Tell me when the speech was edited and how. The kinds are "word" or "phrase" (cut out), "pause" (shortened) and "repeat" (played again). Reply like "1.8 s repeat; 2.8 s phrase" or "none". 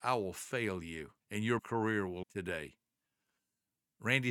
1.2 s pause; 1.6 s word; 2.2 s word